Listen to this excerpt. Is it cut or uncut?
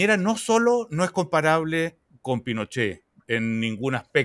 uncut